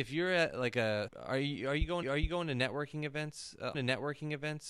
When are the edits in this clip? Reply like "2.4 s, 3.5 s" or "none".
1.1 s, 2.0 s, 3.7 s